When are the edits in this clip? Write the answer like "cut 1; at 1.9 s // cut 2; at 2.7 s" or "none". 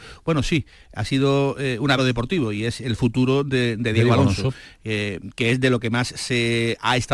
cut 1; at 2.0 s